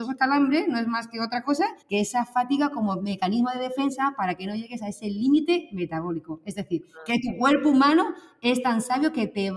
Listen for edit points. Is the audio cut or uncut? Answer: cut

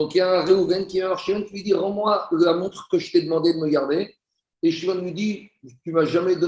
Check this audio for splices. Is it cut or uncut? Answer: uncut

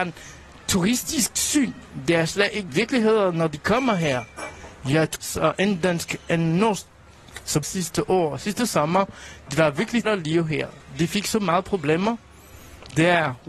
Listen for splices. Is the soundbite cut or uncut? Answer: cut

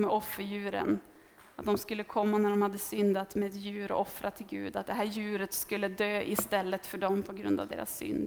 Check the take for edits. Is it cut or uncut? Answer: uncut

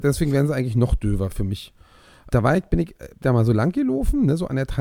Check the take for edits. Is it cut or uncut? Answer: cut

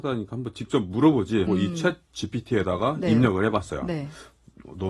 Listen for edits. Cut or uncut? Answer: cut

